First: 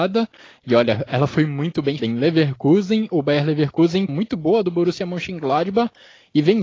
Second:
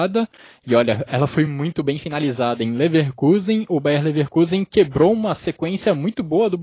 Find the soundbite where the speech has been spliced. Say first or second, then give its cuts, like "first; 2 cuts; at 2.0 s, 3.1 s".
first; 2 cuts; at 2.0 s, 4.1 s